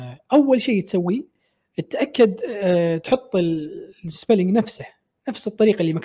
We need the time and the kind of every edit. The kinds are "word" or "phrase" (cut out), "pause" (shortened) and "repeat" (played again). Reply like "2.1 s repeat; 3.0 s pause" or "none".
none